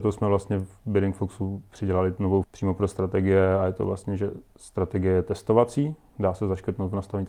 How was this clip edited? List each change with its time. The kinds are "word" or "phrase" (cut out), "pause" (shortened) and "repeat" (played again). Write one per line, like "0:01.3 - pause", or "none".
0:02.4 - word

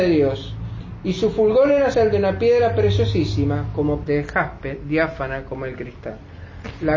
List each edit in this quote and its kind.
0:01.9 - word
0:04.0 - word

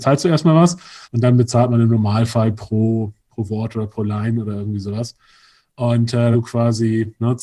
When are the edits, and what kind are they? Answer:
0:01.0 - pause
0:03.2 - pause
0:06.3 - phrase

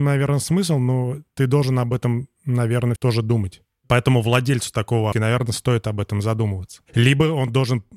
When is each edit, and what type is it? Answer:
0:03.0 - word
0:05.1 - phrase

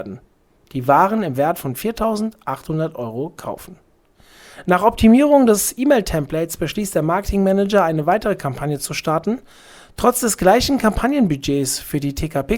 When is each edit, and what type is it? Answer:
none

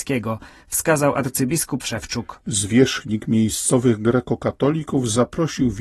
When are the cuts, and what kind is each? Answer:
0:01.8 - word

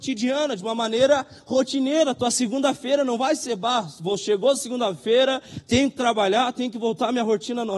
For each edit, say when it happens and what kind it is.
none

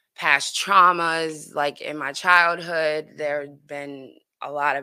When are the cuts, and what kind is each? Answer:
none

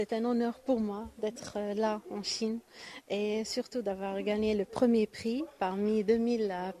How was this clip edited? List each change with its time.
none

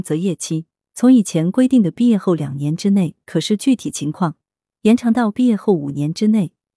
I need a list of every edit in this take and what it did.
none

